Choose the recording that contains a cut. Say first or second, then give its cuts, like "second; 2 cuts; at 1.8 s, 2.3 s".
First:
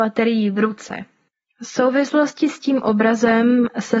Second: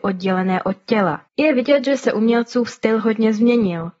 second; 1 cut; at 1.3 s